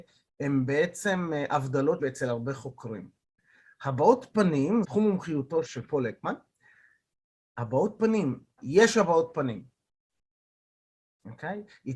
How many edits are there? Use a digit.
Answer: 4